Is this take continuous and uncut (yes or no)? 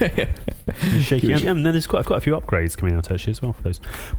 no